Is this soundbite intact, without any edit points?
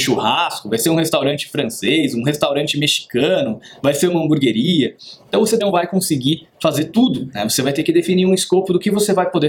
no; 1 cut; at 5.6 s

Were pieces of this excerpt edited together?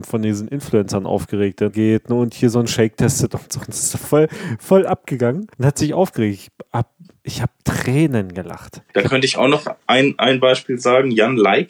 yes; 3 cuts; at 1.7 s, 5.5 s, 8.9 s

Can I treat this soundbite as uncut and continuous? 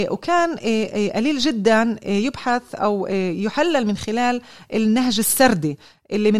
yes; 0 cuts

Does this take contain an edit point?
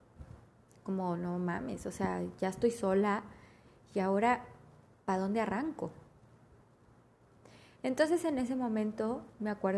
no; 0 cuts

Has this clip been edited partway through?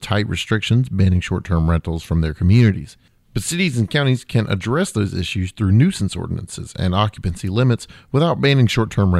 no; 0 cuts

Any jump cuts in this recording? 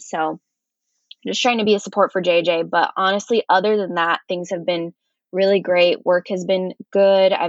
no; 0 cuts

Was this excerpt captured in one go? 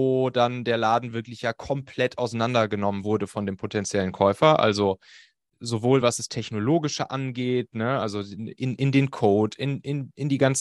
yes; 0 cuts

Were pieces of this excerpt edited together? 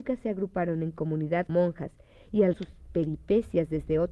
yes; 2 cuts; at 1.5 s, 2.5 s

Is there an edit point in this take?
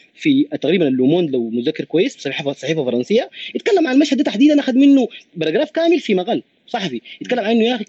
no; 0 cuts

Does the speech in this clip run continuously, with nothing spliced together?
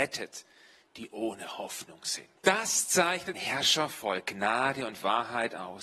no; 2 cuts; at 2.4 s, 3.3 s

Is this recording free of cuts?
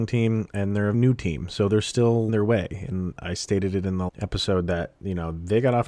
no; 4 cuts; at 0.9 s, 2.3 s, 3.2 s, 4.1 s

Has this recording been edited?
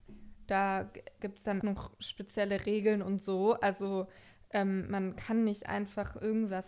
yes; 1 cut; at 1.6 s

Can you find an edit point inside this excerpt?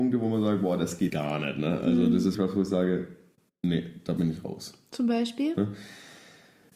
yes; 2 cuts; at 1.1 s, 2.3 s

